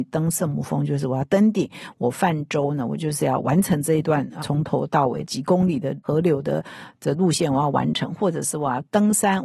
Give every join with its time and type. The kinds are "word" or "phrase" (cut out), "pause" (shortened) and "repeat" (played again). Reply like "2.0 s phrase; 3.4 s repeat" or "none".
4.4 s word